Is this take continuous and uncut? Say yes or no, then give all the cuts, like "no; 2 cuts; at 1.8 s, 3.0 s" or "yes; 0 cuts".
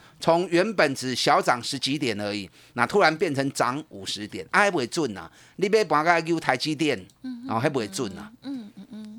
yes; 0 cuts